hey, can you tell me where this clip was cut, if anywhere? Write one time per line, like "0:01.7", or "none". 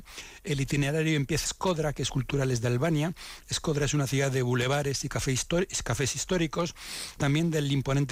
0:01.5
0:02.1
0:07.2